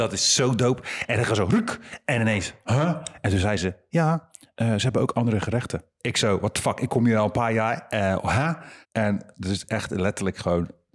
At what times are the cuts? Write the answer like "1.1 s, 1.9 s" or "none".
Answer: 8.8 s